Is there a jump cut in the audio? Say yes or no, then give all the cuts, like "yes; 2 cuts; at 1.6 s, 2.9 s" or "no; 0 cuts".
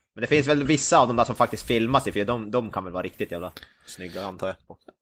no; 0 cuts